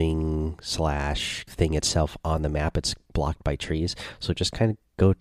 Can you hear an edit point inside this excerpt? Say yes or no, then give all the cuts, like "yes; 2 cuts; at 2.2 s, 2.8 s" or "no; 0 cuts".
yes; 1 cut; at 1.5 s